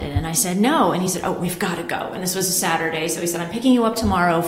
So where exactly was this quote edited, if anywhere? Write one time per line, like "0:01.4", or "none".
none